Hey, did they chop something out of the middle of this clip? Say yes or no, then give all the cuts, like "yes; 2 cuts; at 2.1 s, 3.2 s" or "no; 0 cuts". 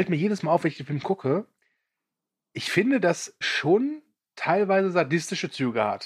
yes; 1 cut; at 3.4 s